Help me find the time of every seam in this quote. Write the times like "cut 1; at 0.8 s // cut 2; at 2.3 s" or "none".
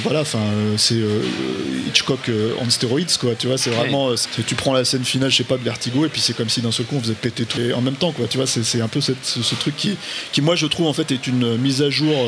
cut 1; at 4.2 s // cut 2; at 7.6 s